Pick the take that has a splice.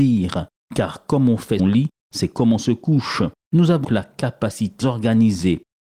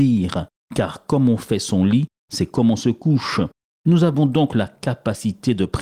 first; 4 cuts; at 1.6 s, 3.4 s, 3.8 s, 4.8 s

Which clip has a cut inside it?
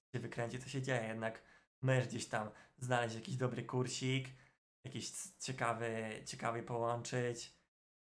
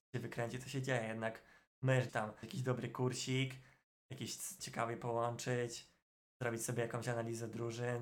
second; 3 cuts; at 2.1 s, 2.4 s, 4.6 s

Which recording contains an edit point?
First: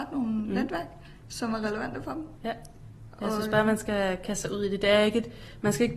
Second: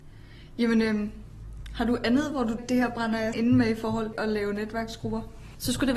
second; 3 cuts; at 2.6 s, 3.3 s, 4.1 s

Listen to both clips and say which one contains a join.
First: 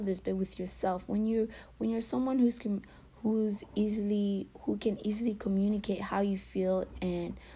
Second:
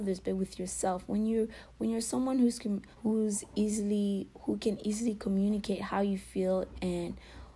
second; 1 cut; at 2.9 s

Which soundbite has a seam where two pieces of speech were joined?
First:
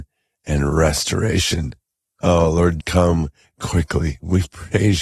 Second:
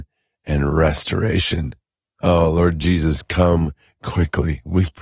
first; 1 cut; at 2.8 s

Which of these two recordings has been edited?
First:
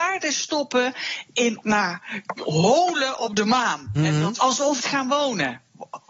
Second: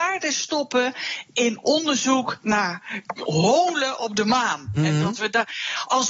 first; 3 cuts; at 1.6 s, 4.4 s, 4.8 s

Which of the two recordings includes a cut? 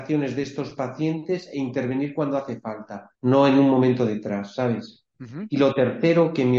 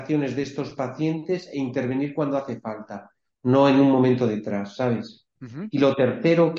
first; 1 cut; at 3.1 s

